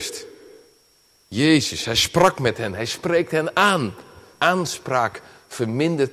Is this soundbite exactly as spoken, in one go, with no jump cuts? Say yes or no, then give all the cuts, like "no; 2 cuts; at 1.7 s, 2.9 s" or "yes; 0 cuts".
no; 1 cut; at 4.3 s